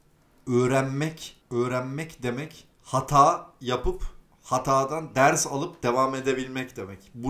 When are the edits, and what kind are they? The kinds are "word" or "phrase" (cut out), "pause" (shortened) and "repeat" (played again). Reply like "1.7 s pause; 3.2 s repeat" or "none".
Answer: 1.4 s pause; 2.7 s pause; 4.3 s pause